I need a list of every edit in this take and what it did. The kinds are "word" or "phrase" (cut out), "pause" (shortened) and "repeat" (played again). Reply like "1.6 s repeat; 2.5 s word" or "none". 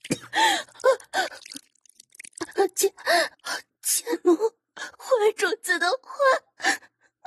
3.3 s pause; 4.9 s pause